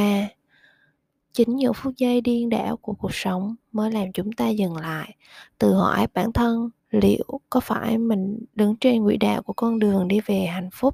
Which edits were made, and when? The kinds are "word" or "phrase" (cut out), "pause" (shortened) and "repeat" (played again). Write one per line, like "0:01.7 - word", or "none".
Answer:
0:06.8 - pause
0:08.5 - pause